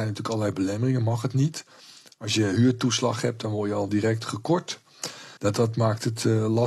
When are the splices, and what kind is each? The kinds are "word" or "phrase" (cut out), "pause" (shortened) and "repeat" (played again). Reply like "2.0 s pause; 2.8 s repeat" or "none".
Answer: 5.4 s pause